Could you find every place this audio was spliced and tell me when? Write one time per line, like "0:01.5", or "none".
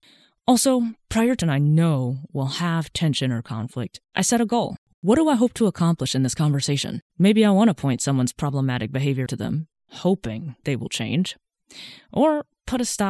0:01.4
0:07.1
0:09.3
0:09.7